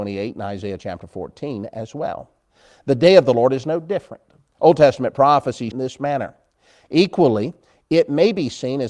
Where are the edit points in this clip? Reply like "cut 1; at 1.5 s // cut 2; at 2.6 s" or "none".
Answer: cut 1; at 5.7 s